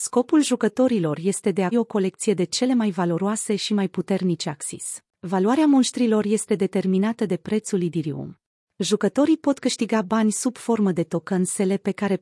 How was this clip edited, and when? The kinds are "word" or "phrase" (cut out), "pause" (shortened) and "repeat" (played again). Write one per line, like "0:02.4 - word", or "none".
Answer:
0:01.7 - word
0:05.1 - pause
0:08.6 - pause